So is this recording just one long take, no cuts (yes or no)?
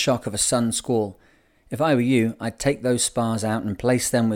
yes